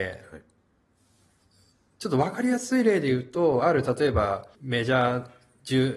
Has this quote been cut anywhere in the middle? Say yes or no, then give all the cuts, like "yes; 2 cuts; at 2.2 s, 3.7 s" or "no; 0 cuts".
yes; 1 cut; at 4.5 s